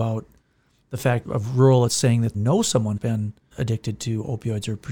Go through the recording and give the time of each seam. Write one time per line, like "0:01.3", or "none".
0:01.3
0:01.9
0:02.3
0:03.0
0:03.5